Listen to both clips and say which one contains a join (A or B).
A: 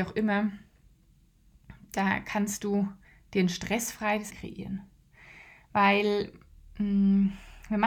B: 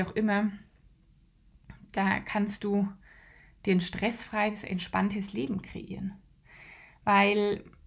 A